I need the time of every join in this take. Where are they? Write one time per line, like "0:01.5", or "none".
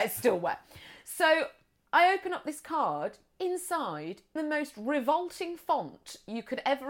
0:04.4